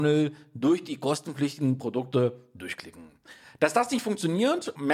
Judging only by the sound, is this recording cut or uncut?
uncut